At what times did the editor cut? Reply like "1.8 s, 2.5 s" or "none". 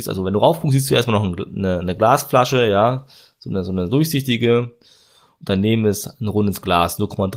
none